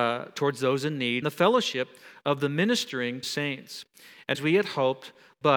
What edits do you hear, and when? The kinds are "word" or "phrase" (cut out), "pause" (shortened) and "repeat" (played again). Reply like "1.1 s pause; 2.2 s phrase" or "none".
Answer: 1.2 s word; 3.2 s phrase; 4.3 s phrase

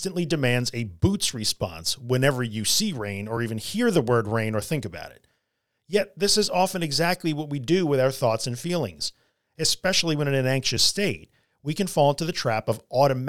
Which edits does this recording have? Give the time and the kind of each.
none

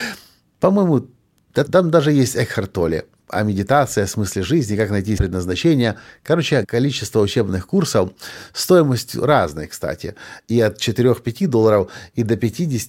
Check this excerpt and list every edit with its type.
1.7 s word; 5.2 s word; 6.6 s word

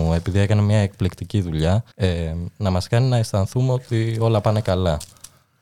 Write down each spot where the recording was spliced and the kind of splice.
1.9 s pause

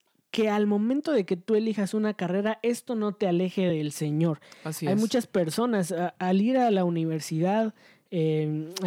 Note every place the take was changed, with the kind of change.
none

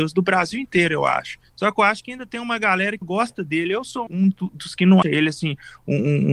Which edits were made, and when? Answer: 1.5 s pause; 3.0 s word; 4.1 s word; 5.0 s word

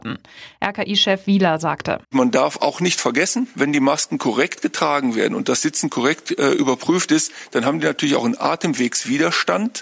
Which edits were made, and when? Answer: 2.0 s pause

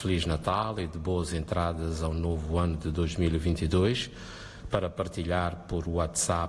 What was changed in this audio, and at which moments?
none

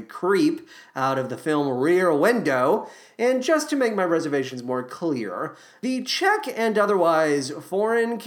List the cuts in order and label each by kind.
none

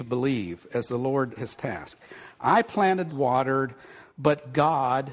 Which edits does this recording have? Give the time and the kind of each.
1.4 s word; 3.1 s phrase; 4.1 s pause

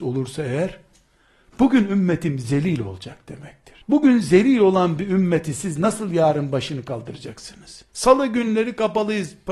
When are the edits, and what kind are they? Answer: 3.8 s pause; 7.9 s pause

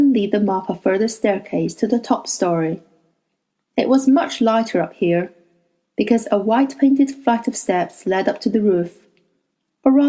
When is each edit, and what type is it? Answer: none

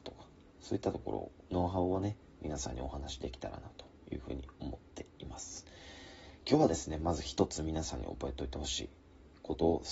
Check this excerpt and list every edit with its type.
1.5 s pause

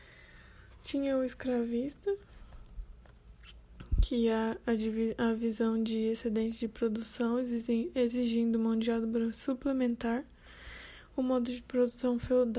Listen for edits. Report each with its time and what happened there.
none

